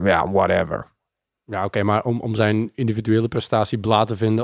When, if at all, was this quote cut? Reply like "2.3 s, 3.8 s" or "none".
none